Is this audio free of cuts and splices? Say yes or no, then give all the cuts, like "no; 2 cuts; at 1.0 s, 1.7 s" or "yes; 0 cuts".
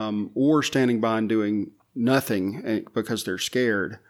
yes; 0 cuts